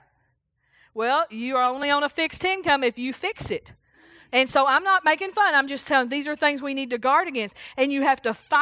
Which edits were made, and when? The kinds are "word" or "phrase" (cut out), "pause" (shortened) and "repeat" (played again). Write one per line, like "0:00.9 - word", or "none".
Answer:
none